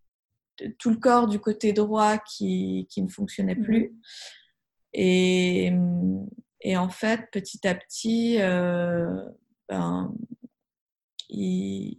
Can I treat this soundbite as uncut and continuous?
yes; 0 cuts

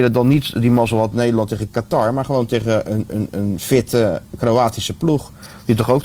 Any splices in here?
no; 0 cuts

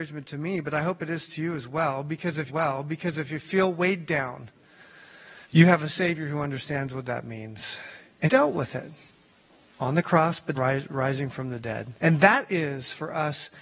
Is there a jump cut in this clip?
yes; 5 cuts; at 2.5 s, 5.4 s, 8.3 s, 10.6 s, 12.0 s

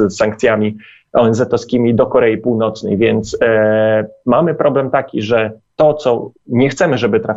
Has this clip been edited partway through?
no; 0 cuts

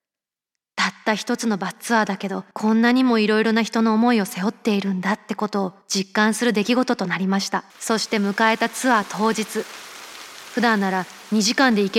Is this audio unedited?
no; 3 cuts; at 2.5 s, 5.8 s, 7.7 s

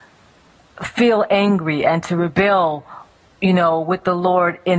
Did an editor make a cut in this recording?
no; 0 cuts

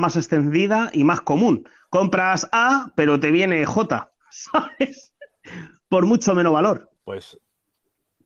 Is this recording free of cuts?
no; 2 cuts; at 4.2 s, 7.0 s

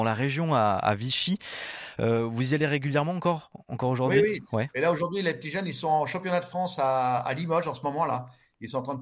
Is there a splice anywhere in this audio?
no; 0 cuts

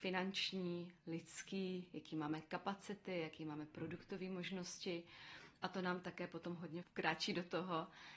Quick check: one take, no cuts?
no; 1 cut; at 6.8 s

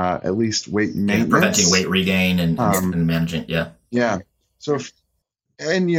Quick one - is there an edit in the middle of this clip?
no; 0 cuts

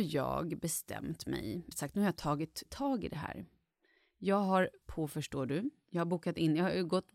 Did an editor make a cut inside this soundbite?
yes; 3 cuts; at 1.7 s, 2.6 s, 4.8 s

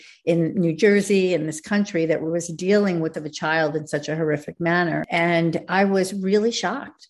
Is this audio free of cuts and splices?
no; 1 cut; at 3.1 s

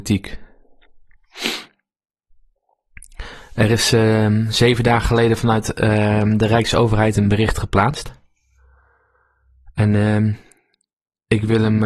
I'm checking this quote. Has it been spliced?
no; 0 cuts

